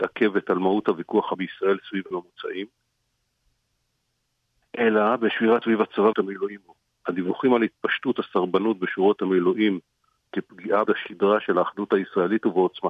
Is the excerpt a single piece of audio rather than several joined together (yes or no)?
no